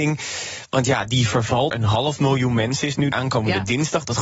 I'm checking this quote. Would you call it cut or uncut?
cut